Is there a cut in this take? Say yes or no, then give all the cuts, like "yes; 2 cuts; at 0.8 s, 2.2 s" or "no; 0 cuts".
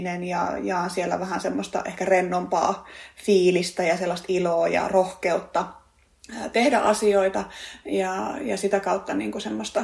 no; 0 cuts